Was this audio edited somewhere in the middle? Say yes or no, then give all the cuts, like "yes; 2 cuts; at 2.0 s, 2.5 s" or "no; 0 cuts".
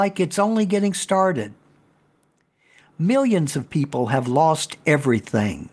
no; 0 cuts